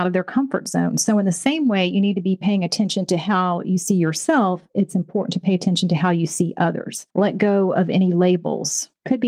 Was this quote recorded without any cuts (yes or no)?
no